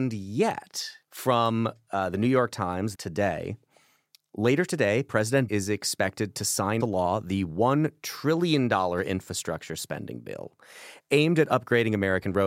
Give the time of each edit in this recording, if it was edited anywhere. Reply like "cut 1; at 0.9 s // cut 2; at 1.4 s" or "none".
cut 1; at 1.0 s // cut 2; at 2.9 s // cut 3; at 5.5 s // cut 4; at 6.8 s